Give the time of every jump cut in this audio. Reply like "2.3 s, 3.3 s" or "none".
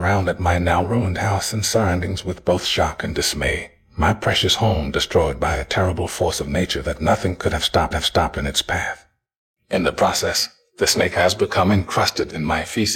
7.9 s

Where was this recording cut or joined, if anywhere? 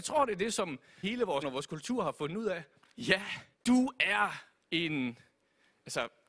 1.0 s, 1.4 s, 3.5 s

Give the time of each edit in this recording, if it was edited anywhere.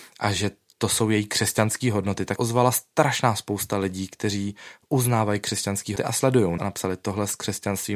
2.4 s, 6.0 s, 6.6 s

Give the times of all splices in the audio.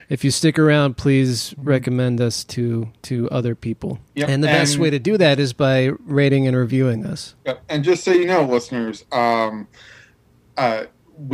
3.0 s, 4.0 s, 7.4 s

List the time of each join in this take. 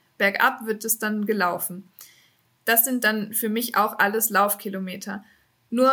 none

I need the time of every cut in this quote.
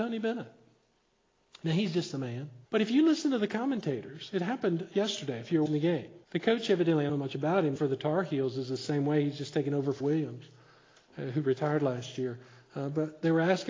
2.7 s, 5.7 s, 6.2 s, 7.1 s, 7.8 s, 10.0 s

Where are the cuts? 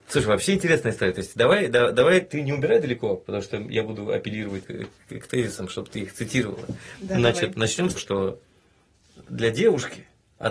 4.6 s, 8.0 s

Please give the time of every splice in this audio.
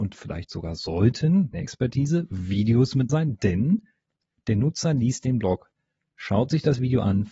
1.5 s, 3.1 s

